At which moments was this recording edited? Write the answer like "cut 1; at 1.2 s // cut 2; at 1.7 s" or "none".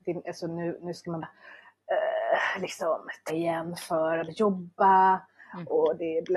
cut 1; at 1.2 s // cut 2; at 3.3 s // cut 3; at 4.3 s